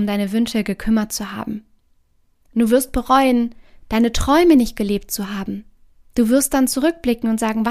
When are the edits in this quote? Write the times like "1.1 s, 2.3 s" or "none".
none